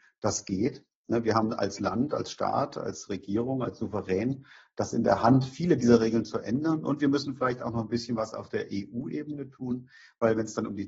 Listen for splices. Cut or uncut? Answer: uncut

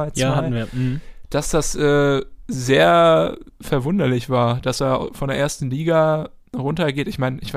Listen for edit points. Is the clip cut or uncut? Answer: uncut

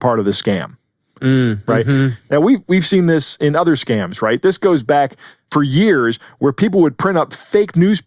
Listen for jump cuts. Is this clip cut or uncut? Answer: uncut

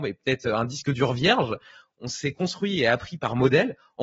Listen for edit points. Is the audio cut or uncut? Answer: uncut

